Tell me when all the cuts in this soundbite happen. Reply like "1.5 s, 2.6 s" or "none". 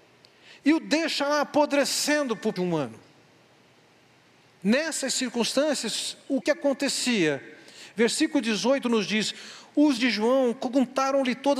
2.6 s, 6.4 s, 10.0 s